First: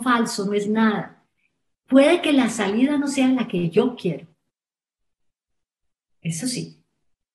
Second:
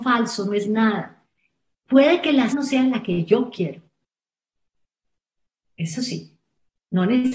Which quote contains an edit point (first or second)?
second